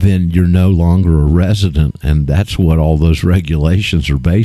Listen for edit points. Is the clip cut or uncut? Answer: uncut